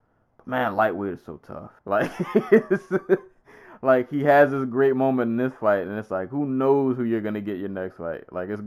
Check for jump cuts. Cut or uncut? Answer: cut